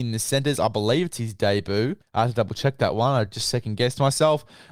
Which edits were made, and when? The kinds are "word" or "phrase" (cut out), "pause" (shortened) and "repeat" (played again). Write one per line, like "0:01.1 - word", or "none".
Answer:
none